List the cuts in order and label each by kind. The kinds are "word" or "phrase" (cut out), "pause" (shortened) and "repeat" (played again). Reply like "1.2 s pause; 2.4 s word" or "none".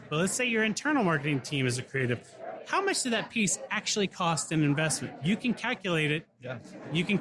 none